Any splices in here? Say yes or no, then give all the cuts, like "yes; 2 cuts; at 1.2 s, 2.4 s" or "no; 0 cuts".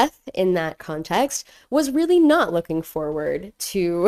no; 0 cuts